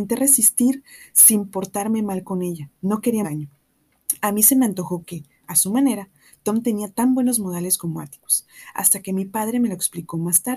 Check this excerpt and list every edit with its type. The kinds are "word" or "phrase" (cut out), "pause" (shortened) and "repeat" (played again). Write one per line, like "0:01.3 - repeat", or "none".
0:03.2 - phrase